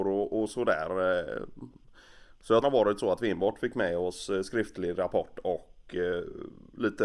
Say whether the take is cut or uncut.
cut